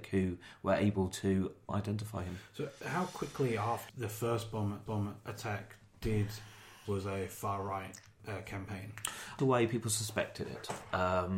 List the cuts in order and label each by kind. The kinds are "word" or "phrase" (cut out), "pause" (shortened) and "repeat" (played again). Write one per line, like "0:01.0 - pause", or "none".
0:01.7 - word
0:03.9 - word
0:04.9 - repeat
0:06.9 - phrase
0:08.2 - word
0:09.4 - phrase